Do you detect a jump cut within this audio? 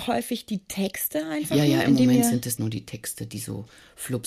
yes; 1 cut; at 2.6 s

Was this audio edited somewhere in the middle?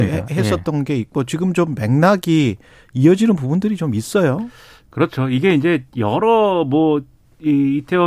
no; 0 cuts

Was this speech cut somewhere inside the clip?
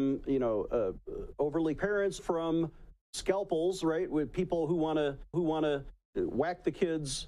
yes; 4 cuts; at 1.8 s, 2.2 s, 3.0 s, 5.3 s

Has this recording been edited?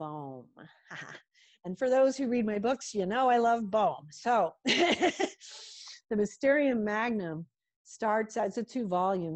no; 0 cuts

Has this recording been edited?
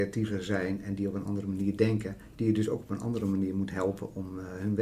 no; 0 cuts

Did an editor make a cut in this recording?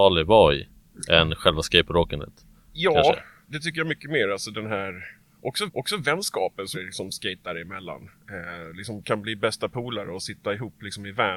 yes; 4 cuts; at 3.4 s, 5.7 s, 6.7 s, 8.2 s

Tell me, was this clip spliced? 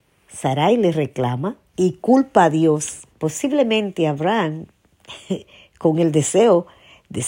yes; 2 cuts; at 1.7 s, 3.1 s

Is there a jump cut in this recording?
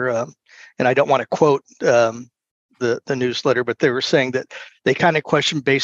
no; 0 cuts

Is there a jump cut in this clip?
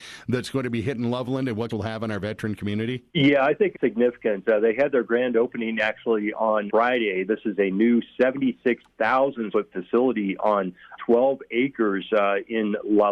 yes; 6 cuts; at 1.7 s, 3.1 s, 3.7 s, 6.7 s, 9.5 s, 11.0 s

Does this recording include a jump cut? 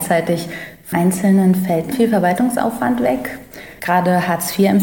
yes; 2 cuts; at 0.9 s, 1.9 s

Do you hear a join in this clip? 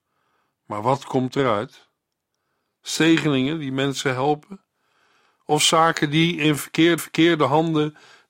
yes; 1 cut; at 7.0 s

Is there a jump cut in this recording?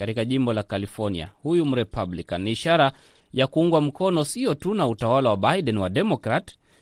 no; 0 cuts

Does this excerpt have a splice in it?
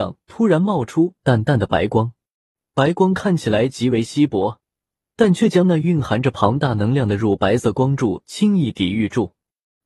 no; 0 cuts

